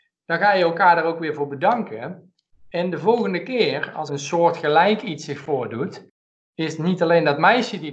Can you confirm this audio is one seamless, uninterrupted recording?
no; 1 cut; at 4.1 s

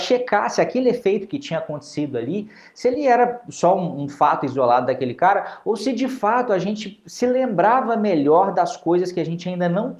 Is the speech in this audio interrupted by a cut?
no; 0 cuts

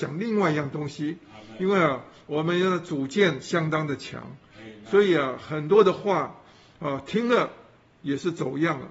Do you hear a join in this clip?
no; 0 cuts

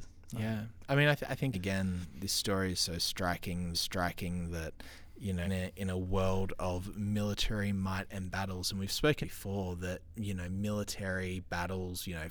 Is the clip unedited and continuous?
no; 4 cuts; at 1.5 s, 3.7 s, 5.4 s, 9.2 s

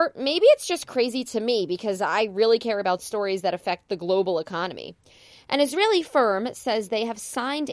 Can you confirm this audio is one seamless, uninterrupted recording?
yes; 0 cuts

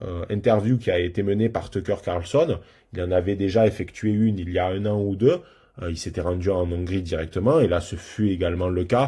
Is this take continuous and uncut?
yes; 0 cuts

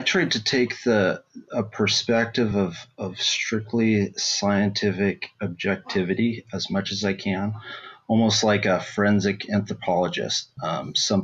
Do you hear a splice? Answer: no; 0 cuts

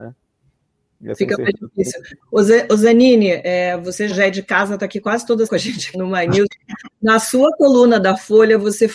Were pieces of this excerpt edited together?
yes; 3 cuts; at 4.1 s, 5.5 s, 5.9 s

